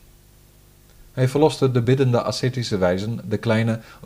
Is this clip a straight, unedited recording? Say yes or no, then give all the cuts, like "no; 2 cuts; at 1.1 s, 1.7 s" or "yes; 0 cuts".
yes; 0 cuts